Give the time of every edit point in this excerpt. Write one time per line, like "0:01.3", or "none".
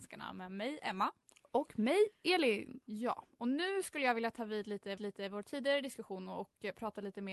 0:05.0